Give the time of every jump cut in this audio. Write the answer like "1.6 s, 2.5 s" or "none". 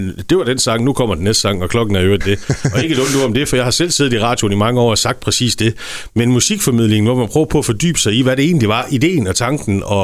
none